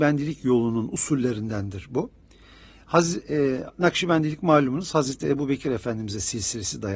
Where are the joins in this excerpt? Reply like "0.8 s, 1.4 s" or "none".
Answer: none